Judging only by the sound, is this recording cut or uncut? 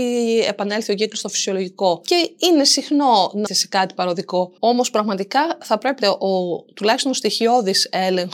cut